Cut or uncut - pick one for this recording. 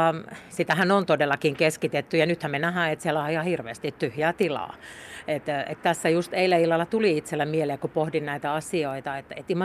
uncut